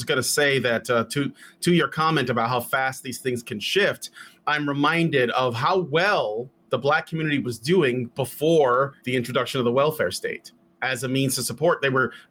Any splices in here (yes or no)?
yes